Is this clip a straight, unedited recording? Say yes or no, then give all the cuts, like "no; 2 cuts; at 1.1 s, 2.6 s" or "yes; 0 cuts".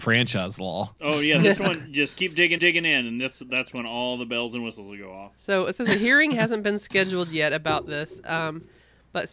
no; 1 cut; at 2.6 s